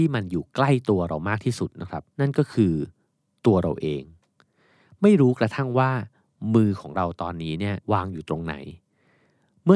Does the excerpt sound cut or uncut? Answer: cut